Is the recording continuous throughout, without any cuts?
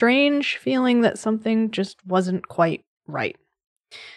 yes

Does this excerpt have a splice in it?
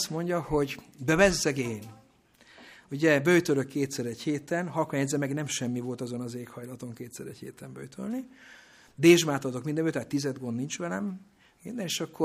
no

